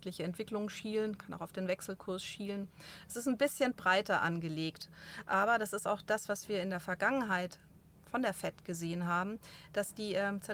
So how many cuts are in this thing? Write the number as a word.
zero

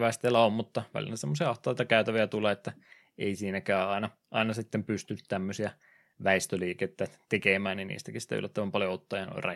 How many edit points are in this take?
zero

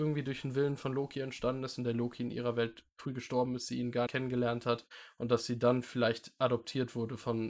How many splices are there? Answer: one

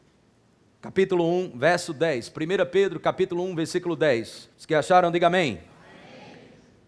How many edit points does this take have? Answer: one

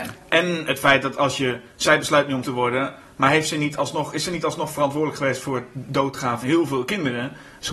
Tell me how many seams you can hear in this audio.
two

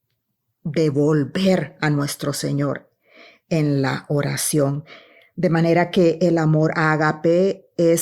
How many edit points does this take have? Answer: zero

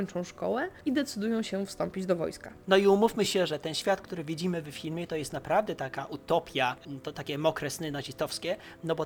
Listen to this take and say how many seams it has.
zero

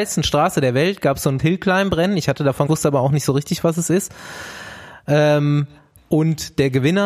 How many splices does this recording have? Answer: two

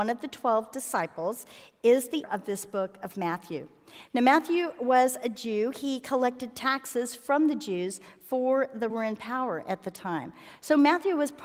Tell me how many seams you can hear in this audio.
two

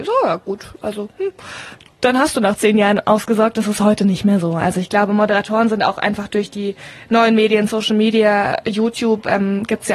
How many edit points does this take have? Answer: zero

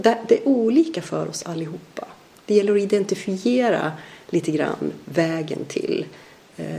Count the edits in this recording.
zero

